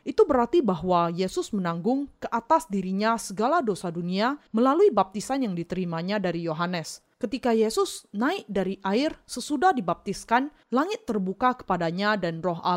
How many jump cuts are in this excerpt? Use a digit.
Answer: 3